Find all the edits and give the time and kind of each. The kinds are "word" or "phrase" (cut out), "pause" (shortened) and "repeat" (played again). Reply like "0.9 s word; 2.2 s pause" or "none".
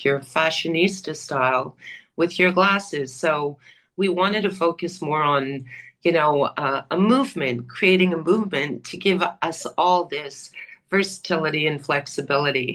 none